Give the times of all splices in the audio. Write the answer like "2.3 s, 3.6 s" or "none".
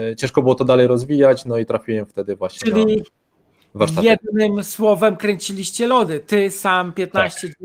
none